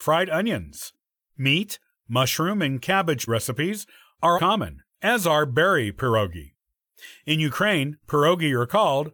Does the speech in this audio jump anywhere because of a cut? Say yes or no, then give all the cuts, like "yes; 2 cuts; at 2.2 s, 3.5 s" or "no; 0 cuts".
yes; 3 cuts; at 1.9 s, 3.3 s, 4.3 s